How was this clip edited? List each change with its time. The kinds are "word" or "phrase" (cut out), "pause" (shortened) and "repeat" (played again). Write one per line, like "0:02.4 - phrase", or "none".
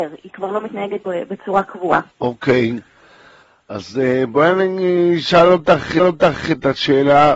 0:02.1 - pause
0:06.0 - repeat